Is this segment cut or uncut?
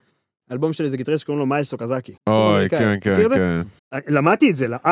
cut